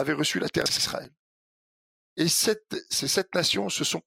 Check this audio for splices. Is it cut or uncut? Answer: uncut